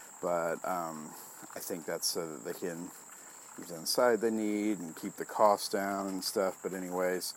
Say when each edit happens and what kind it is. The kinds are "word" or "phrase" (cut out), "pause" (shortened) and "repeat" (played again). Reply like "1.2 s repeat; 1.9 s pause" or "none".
3.6 s phrase